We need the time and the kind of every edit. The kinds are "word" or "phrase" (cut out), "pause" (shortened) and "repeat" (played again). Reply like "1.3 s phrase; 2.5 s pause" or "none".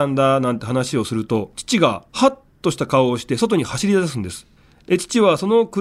2.1 s pause; 4.6 s pause